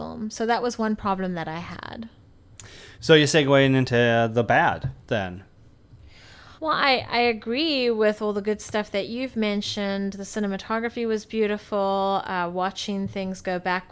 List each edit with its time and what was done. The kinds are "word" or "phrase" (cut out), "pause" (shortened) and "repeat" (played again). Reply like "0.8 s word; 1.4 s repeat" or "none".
2.9 s pause; 6.6 s pause